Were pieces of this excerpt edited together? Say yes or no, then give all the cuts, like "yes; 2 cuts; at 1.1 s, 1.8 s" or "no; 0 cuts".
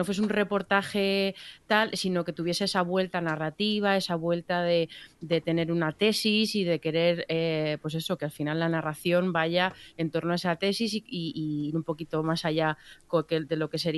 no; 0 cuts